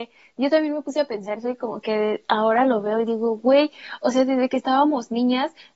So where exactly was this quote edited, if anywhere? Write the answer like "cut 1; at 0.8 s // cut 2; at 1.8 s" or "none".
cut 1; at 1.4 s